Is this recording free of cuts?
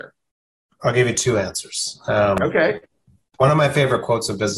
yes; 0 cuts

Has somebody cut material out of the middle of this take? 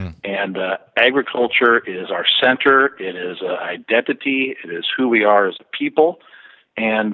no; 0 cuts

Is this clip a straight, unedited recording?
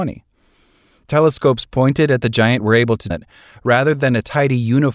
no; 1 cut; at 3.1 s

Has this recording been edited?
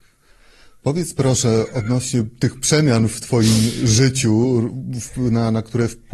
no; 0 cuts

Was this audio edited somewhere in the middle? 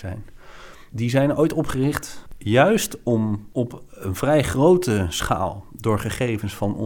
yes; 1 cut; at 0.9 s

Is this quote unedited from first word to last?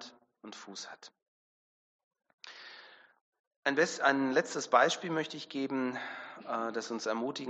yes; 0 cuts

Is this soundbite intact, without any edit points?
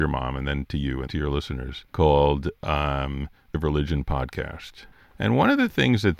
no; 4 cuts; at 1.1 s, 1.9 s, 3.5 s, 4.9 s

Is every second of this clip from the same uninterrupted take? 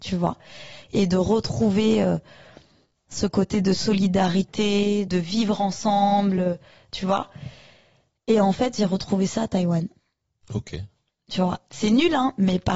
yes; 0 cuts

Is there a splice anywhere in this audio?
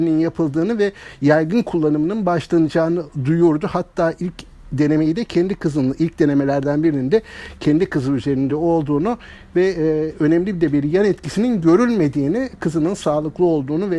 no; 0 cuts

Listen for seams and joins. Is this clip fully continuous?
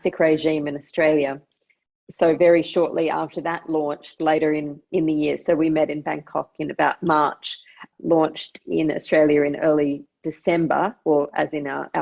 yes; 0 cuts

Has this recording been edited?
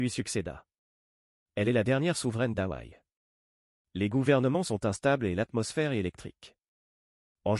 no; 0 cuts

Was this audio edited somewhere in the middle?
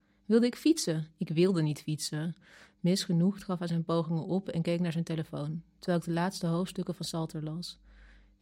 no; 0 cuts

